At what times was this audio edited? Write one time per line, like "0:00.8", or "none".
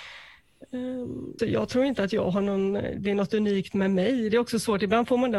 0:01.4